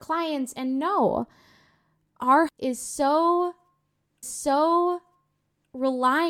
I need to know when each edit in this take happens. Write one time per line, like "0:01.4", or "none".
0:02.5
0:04.2